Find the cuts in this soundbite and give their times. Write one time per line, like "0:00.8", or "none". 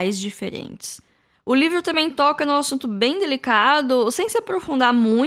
none

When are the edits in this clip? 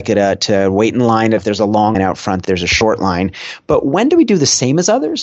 0:01.4
0:01.9
0:02.4

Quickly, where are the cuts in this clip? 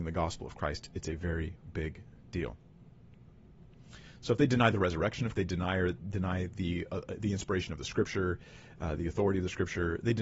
0:05.3

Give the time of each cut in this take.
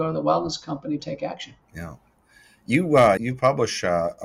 0:01.0
0:01.6
0:03.2

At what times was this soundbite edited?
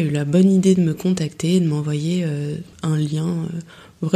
0:02.7

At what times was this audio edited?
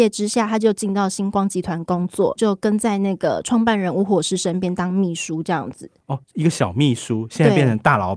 0:06.2

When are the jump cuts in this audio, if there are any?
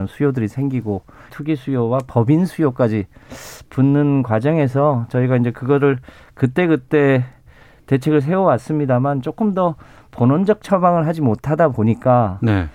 0:01.3

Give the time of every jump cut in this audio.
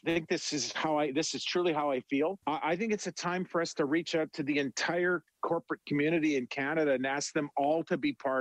0:02.4

